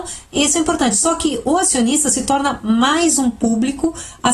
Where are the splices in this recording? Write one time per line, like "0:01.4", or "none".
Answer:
none